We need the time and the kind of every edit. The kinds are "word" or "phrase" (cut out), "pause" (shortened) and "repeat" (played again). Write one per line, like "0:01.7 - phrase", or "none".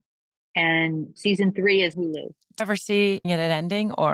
0:01.2 - word
0:01.9 - word
0:02.6 - word
0:03.2 - word